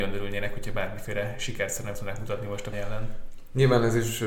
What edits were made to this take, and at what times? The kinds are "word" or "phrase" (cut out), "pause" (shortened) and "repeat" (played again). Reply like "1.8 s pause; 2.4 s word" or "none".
1.9 s word; 2.7 s word